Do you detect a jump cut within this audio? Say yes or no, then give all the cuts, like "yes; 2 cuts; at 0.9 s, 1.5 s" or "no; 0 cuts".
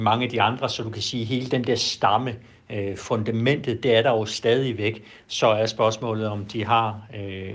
no; 0 cuts